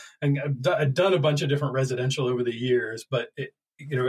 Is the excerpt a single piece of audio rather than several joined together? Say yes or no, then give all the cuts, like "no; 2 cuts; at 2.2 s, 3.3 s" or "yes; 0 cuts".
yes; 0 cuts